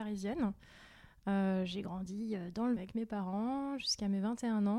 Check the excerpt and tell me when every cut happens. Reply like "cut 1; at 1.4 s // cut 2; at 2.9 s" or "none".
cut 1; at 2.8 s